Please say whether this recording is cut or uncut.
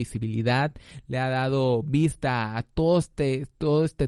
uncut